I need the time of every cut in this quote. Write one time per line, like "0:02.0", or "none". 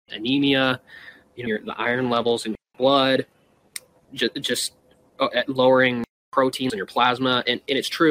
0:01.5
0:02.7
0:04.0
0:06.7